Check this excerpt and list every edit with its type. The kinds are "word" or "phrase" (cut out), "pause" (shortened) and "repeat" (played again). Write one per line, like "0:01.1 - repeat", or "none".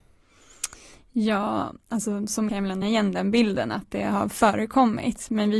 0:02.5 - phrase
0:02.8 - word

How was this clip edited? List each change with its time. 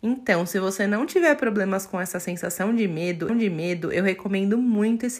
0:03.3 - repeat

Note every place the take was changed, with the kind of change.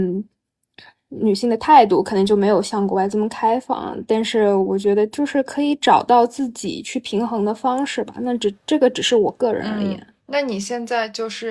0:10.2 - pause

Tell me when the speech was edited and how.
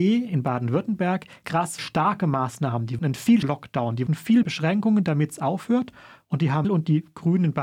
0:01.4 - word
0:01.8 - word
0:03.0 - word
0:03.4 - word
0:04.1 - word
0:04.4 - word
0:06.6 - word

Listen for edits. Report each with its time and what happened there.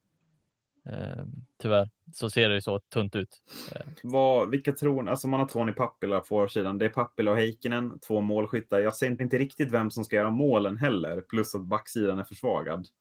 0:01.5 - pause
0:04.0 - pause
0:05.5 - phrase
0:06.2 - word
0:09.2 - phrase

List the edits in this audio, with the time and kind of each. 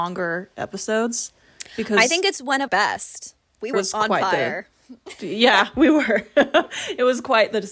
0:02.7 - word
0:03.7 - word

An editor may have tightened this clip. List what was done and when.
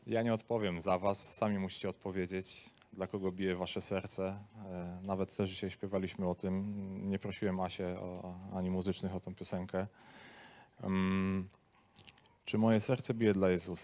none

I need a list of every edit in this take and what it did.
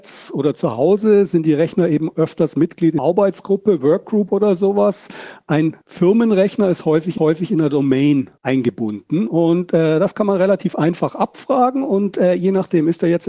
0:03.0 - word
0:05.8 - pause
0:07.2 - repeat
0:08.4 - pause

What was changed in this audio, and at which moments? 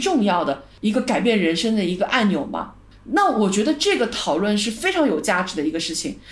none

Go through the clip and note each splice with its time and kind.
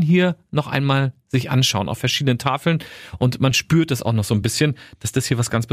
none

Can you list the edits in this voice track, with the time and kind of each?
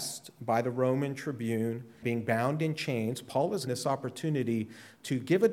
0:02.0 - word
0:03.7 - word

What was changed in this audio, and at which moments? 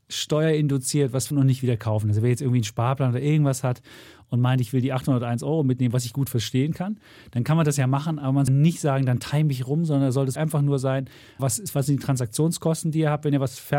0:01.3 - word
0:08.5 - word
0:10.4 - word
0:11.4 - word

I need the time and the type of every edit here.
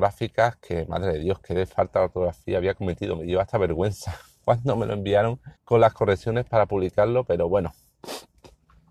0:05.6 - pause

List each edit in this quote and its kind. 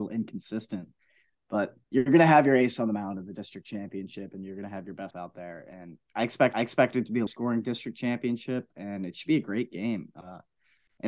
0:01.8 - pause
0:05.1 - word
0:06.0 - pause
0:06.5 - repeat
0:07.3 - word

